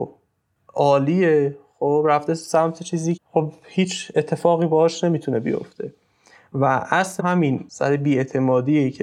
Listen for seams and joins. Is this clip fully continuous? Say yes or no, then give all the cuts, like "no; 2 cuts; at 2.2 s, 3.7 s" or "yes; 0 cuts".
no; 2 cuts; at 3.2 s, 7.2 s